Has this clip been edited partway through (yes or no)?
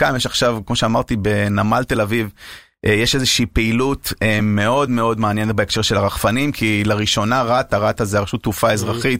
no